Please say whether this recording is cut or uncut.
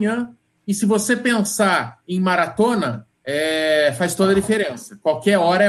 cut